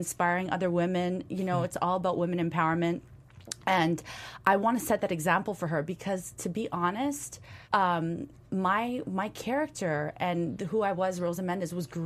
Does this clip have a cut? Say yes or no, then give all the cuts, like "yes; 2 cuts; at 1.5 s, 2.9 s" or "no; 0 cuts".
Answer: yes; 1 cut; at 7.6 s